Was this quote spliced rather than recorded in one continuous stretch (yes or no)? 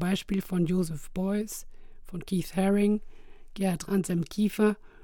yes